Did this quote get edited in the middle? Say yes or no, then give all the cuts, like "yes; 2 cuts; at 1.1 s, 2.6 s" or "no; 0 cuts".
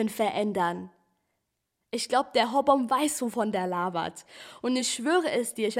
no; 0 cuts